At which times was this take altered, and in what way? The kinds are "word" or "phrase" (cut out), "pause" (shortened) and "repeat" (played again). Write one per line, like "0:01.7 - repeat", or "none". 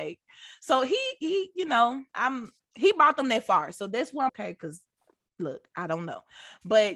0:02.1 - pause
0:04.3 - phrase